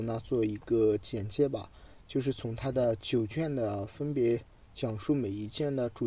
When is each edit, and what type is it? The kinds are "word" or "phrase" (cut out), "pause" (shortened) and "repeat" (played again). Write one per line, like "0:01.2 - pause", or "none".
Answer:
none